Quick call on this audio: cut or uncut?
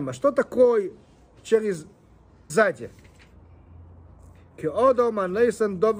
cut